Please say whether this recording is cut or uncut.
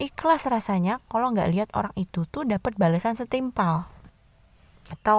uncut